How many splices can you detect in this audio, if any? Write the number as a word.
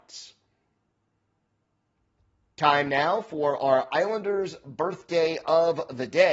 zero